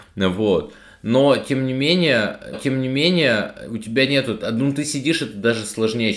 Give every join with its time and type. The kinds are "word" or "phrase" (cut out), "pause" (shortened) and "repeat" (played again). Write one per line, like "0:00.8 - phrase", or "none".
0:02.5 - repeat